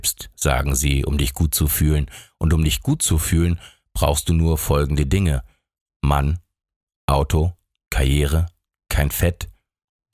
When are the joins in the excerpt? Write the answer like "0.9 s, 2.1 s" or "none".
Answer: none